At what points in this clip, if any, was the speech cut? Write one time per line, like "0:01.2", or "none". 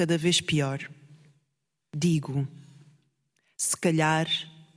none